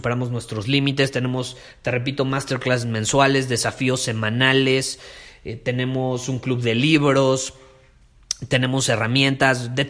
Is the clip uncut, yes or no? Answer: yes